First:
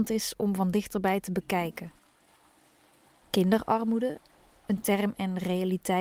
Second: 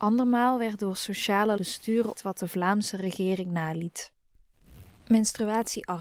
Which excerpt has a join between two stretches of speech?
second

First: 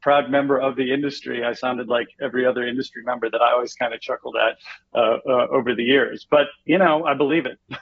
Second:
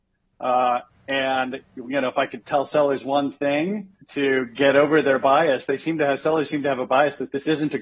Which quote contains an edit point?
second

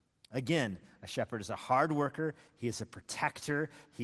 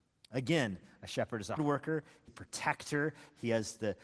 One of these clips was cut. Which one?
second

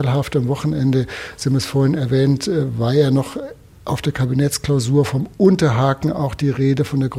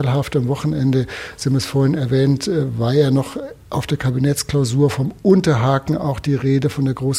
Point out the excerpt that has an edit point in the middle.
second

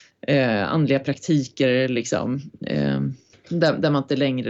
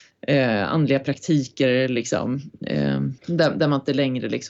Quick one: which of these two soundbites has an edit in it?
second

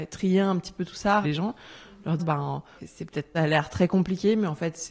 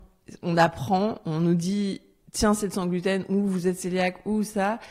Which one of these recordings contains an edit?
first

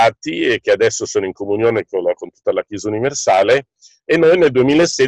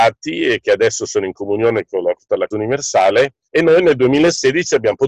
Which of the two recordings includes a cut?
second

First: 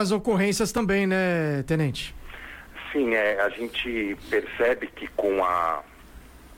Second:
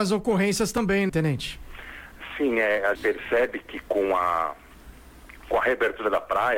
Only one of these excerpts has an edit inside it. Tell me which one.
second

